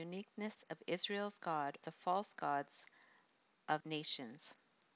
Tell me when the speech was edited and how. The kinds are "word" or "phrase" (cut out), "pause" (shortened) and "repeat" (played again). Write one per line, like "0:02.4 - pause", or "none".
0:01.8 - word
0:03.8 - word